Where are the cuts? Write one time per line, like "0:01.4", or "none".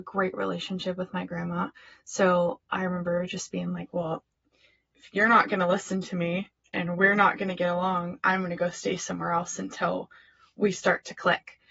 none